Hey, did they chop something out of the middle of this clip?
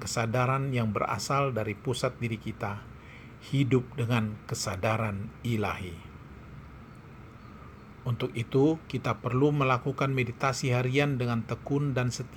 no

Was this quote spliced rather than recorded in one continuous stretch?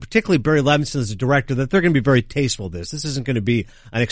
no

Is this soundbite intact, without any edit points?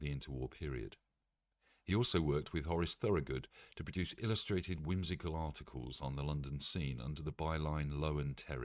yes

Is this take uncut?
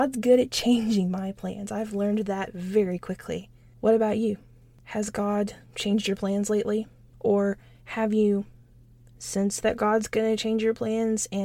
yes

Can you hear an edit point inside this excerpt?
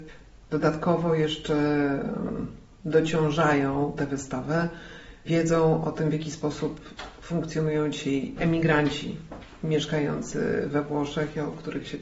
no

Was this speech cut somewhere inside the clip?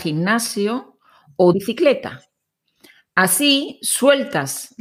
yes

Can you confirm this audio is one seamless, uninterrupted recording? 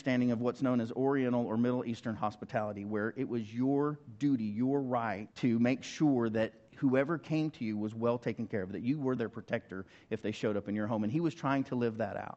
no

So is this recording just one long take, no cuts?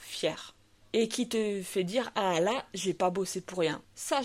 yes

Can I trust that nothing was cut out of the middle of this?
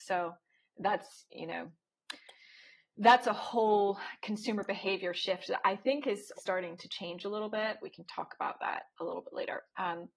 no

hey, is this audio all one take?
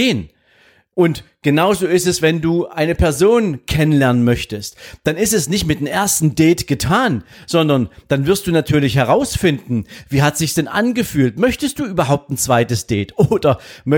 yes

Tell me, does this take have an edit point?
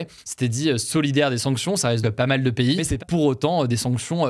yes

